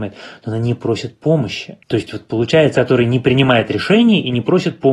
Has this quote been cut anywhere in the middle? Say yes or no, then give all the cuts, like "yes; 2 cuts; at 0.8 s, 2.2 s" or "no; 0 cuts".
yes; 2 cuts; at 1.8 s, 2.7 s